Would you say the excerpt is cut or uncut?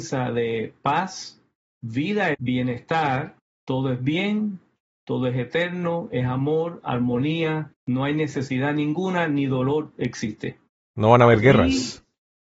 cut